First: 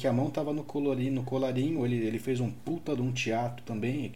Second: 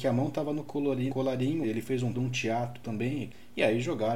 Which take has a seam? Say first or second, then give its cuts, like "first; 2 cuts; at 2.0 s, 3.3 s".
second; 3 cuts; at 1.1 s, 1.6 s, 2.1 s